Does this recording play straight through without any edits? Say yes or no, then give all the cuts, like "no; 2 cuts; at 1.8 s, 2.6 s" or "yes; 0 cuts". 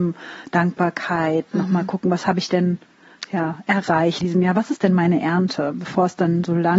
no; 1 cut; at 4.2 s